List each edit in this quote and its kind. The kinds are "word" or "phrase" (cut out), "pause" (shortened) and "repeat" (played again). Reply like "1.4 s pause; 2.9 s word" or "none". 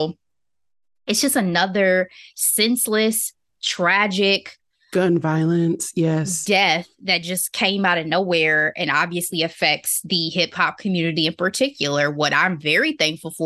none